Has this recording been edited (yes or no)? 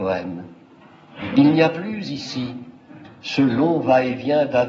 no